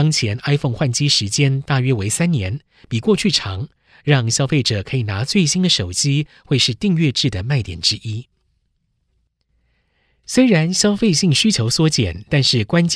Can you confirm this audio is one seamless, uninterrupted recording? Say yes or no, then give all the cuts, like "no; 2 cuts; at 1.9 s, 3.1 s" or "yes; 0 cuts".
yes; 0 cuts